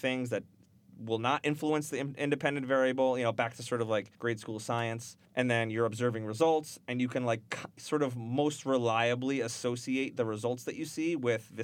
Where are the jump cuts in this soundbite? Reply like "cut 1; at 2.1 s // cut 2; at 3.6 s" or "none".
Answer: cut 1; at 4.1 s // cut 2; at 5.3 s